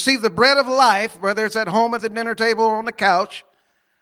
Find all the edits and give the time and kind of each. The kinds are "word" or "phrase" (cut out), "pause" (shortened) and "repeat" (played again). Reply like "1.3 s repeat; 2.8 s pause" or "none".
none